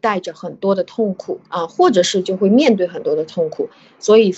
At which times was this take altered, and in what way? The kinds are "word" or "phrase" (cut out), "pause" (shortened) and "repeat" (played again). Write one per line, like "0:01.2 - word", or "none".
0:01.5 - pause